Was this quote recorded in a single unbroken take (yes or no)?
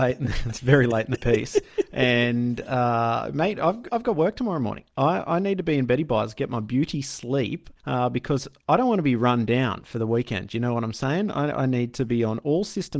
no